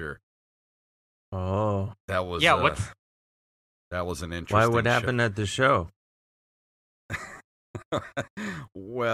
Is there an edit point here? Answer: no; 0 cuts

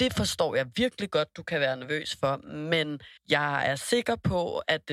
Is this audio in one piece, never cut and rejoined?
no; 1 cut; at 3.2 s

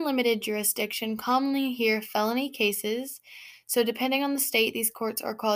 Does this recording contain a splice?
no; 0 cuts

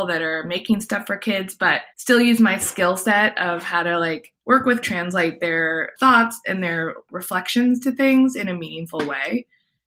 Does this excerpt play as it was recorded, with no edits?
no; 3 cuts; at 1.9 s, 4.4 s, 4.8 s

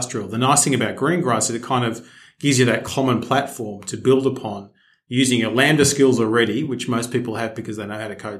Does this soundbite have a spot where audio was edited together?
no; 0 cuts

